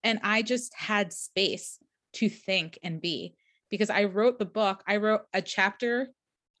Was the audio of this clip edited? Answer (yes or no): no